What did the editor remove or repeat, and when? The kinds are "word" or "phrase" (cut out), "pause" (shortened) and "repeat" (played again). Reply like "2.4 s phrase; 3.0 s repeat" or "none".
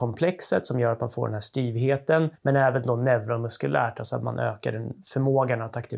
2.4 s pause